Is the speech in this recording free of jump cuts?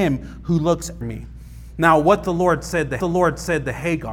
no; 2 cuts; at 1.0 s, 3.0 s

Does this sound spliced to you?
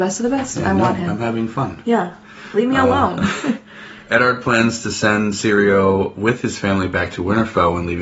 no; 0 cuts

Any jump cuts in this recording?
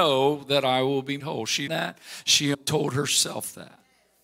yes; 3 cuts; at 1.2 s, 1.7 s, 2.5 s

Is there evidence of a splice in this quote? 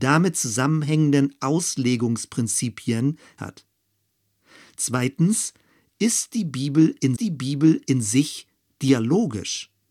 yes; 2 cuts; at 3.4 s, 7.2 s

